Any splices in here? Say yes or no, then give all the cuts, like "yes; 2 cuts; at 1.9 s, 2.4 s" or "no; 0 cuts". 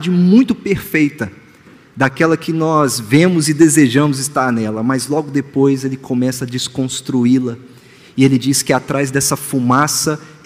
no; 0 cuts